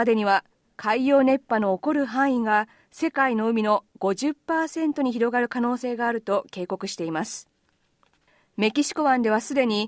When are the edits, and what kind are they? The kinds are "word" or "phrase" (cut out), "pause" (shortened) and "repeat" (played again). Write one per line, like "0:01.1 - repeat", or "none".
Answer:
none